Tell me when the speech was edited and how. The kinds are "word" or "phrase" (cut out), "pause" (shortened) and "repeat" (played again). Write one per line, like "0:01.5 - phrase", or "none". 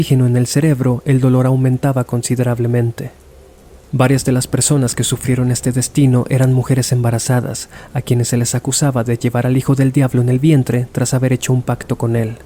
none